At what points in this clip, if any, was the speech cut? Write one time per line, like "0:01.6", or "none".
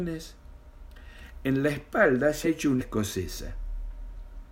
0:02.4
0:02.8